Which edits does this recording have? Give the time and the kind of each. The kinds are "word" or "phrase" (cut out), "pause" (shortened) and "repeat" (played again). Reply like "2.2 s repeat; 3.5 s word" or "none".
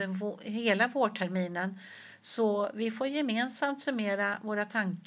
none